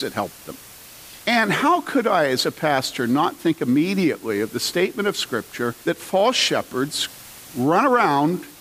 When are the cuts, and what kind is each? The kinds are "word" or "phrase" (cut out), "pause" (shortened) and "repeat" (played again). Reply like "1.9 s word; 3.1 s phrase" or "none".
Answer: 1.2 s pause; 5.8 s pause

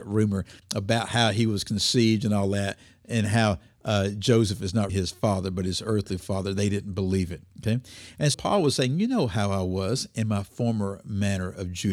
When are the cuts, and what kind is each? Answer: 4.9 s word; 7.5 s pause; 8.3 s word

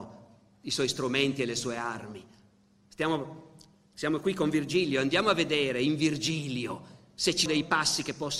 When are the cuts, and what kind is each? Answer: 7.5 s word

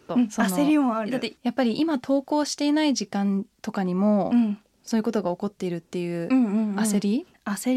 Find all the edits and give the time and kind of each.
1.4 s pause

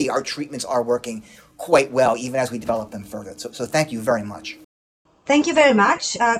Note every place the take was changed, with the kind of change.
none

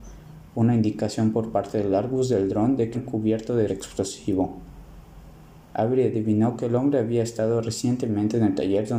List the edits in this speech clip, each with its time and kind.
2.9 s word; 3.7 s word

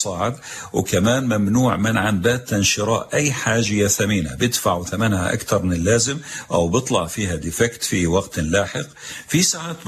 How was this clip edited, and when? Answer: none

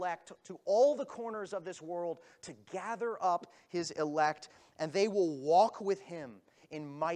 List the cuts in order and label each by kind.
none

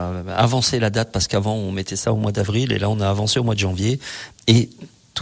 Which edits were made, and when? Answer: none

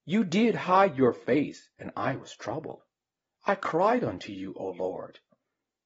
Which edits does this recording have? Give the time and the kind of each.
none

